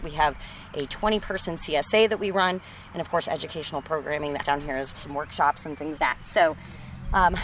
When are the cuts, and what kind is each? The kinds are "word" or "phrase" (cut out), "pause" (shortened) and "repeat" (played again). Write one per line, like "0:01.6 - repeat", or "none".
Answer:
0:04.4 - word
0:04.9 - word
0:06.0 - word